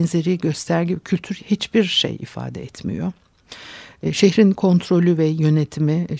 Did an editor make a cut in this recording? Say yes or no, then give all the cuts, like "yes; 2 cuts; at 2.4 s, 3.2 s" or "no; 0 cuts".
yes; 1 cut; at 1.4 s